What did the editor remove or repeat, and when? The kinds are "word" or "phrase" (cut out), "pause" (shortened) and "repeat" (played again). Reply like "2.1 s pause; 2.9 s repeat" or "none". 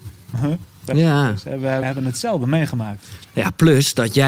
1.8 s word